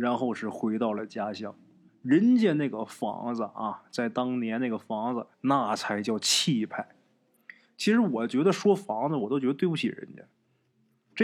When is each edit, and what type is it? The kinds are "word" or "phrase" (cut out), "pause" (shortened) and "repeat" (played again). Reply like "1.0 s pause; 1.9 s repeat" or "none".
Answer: 1.9 s pause; 5.3 s pause